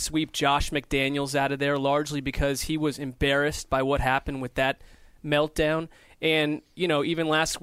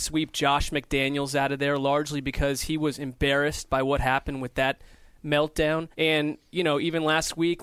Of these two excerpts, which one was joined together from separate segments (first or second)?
second